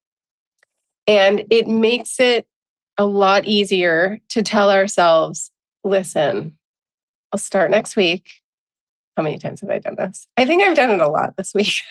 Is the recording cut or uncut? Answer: uncut